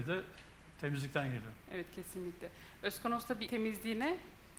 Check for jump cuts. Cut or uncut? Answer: cut